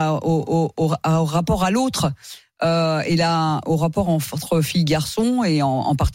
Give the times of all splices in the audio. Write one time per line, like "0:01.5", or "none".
none